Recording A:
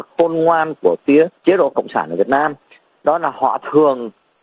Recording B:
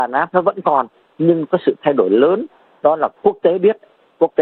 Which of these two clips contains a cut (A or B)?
A